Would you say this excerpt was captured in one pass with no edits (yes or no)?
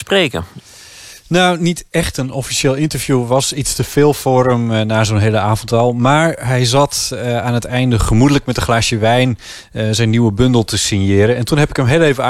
yes